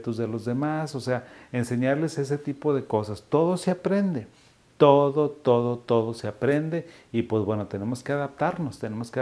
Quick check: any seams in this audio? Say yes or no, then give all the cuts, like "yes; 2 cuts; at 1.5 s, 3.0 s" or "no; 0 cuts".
no; 0 cuts